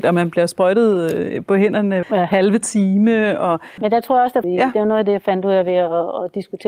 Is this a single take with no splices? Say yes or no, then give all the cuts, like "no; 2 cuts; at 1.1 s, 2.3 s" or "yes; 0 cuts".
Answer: no; 2 cuts; at 2.0 s, 4.4 s